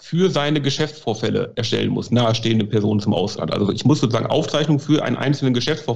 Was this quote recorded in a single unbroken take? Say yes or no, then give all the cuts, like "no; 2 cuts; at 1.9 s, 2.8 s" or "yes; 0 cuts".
no; 1 cut; at 2.1 s